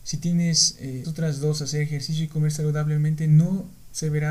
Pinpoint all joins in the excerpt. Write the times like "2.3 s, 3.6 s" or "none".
1.0 s

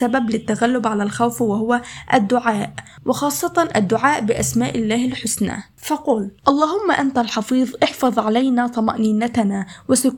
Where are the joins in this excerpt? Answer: 6.4 s

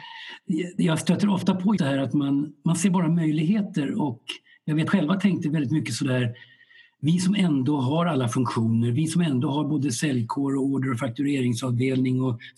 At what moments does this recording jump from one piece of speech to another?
1.8 s, 4.9 s

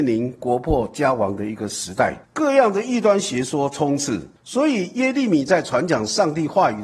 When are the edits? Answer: 2.2 s, 4.4 s

